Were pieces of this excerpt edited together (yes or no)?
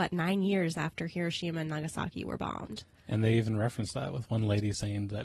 no